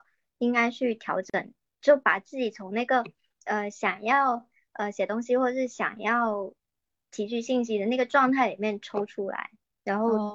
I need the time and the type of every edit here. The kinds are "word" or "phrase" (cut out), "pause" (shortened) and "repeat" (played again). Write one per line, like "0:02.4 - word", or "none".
none